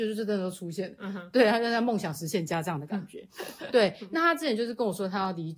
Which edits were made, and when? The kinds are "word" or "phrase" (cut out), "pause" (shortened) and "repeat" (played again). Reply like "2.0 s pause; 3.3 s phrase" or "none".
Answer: none